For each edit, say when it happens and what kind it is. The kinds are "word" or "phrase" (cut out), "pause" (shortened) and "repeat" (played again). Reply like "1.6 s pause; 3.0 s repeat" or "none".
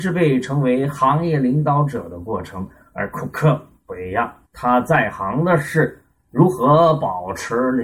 4.5 s pause